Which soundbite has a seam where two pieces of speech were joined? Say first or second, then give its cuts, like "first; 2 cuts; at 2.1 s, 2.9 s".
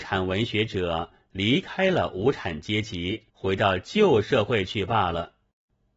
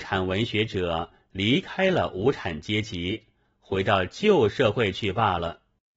first; 1 cut; at 3.3 s